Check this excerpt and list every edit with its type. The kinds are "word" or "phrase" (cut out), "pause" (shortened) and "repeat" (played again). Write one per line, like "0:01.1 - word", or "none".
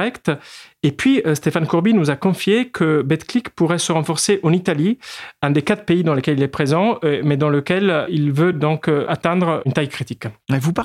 none